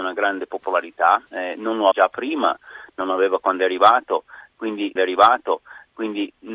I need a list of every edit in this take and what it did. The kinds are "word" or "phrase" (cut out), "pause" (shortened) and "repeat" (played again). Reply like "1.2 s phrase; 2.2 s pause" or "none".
1.3 s pause; 1.9 s word; 5.0 s repeat